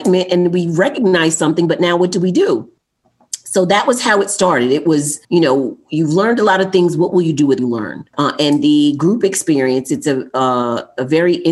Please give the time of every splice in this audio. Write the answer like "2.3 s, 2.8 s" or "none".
5.2 s, 7.6 s, 8.1 s